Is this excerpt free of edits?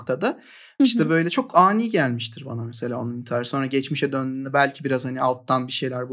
yes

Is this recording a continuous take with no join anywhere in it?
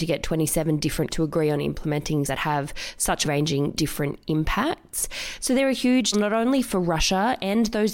no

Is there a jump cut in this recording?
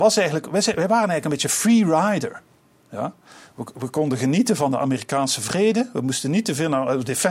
no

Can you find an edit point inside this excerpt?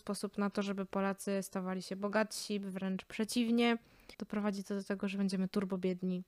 yes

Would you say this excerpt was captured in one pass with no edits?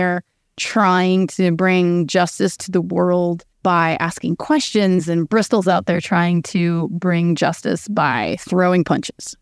no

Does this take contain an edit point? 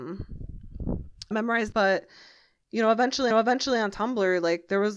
yes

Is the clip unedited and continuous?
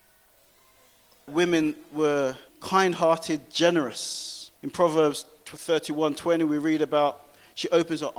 no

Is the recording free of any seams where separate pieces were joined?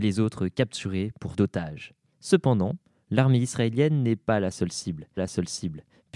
no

